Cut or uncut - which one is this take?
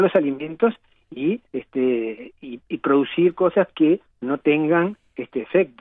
cut